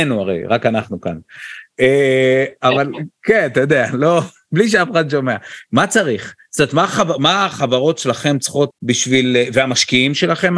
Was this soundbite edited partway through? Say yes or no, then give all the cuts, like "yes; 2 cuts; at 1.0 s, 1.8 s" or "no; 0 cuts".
yes; 1 cut; at 8.7 s